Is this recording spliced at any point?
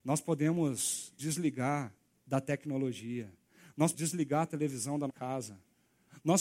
yes; 3 cuts; at 1.2 s, 3.9 s, 5.1 s

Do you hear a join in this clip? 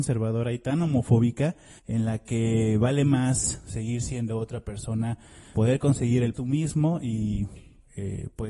yes; 3 cuts; at 1.8 s, 5.5 s, 6.3 s

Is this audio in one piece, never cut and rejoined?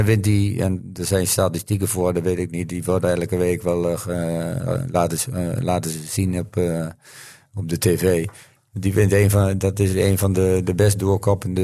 yes; 0 cuts

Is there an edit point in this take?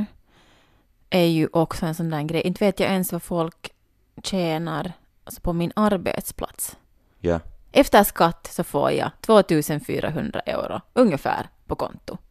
no; 0 cuts

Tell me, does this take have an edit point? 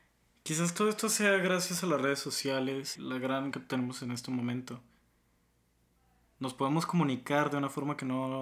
yes; 2 cuts; at 3.0 s, 3.5 s

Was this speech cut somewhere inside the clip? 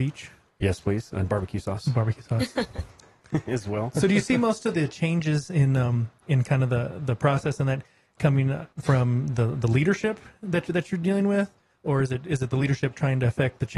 yes; 1 cut; at 8.7 s

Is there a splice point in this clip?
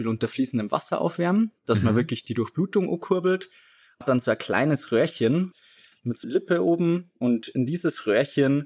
yes; 2 cuts; at 4.0 s, 6.2 s

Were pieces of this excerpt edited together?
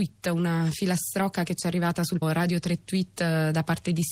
yes; 1 cut; at 2.2 s

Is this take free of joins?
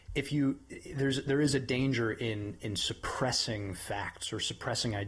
yes; 0 cuts

